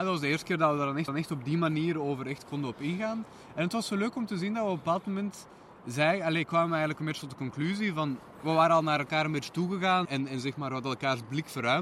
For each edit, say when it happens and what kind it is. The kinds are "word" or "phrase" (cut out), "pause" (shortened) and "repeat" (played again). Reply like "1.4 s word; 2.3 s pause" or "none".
1.1 s repeat; 2.4 s word; 10.0 s word